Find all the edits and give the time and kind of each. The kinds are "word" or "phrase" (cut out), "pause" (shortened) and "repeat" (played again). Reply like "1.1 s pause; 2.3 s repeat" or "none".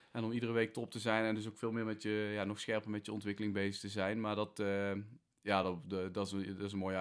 none